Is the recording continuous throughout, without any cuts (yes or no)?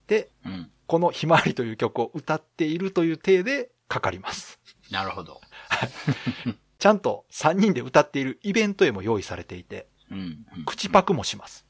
yes